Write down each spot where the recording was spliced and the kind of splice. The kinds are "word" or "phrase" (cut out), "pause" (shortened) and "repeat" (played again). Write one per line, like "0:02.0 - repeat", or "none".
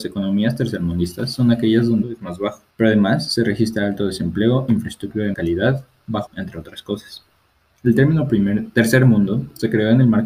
0:02.0 - phrase
0:02.7 - pause
0:05.3 - word
0:06.3 - phrase